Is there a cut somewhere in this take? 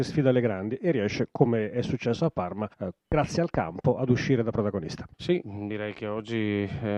yes; 2 cuts; at 2.7 s, 5.1 s

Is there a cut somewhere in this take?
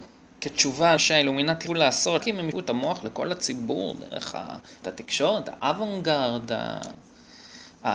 yes; 5 cuts; at 1.0 s, 1.7 s, 2.2 s, 2.5 s, 4.8 s

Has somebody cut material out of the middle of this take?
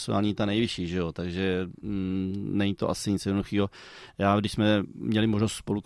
no; 0 cuts

